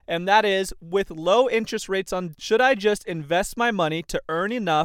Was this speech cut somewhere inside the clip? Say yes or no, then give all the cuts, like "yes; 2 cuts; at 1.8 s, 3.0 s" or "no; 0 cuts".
yes; 1 cut; at 2.3 s